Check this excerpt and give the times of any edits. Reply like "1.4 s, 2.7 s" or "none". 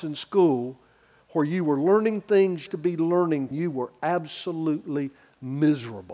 2.7 s, 3.5 s